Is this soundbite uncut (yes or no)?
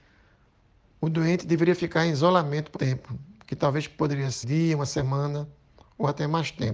no